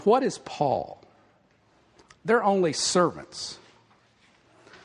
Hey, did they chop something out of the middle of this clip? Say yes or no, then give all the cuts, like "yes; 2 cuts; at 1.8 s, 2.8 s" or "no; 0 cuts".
no; 0 cuts